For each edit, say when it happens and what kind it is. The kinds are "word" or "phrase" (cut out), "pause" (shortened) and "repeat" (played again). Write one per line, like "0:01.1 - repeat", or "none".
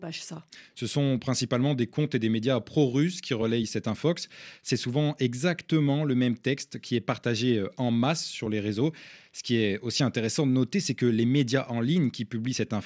none